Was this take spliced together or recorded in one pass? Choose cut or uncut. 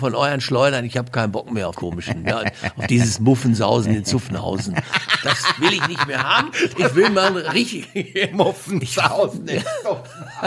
cut